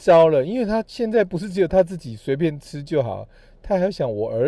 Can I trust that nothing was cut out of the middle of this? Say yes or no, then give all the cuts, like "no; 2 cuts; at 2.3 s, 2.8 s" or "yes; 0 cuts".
yes; 0 cuts